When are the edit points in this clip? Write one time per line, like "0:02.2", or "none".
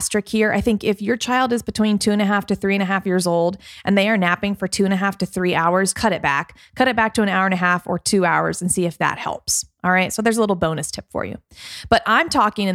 0:05.9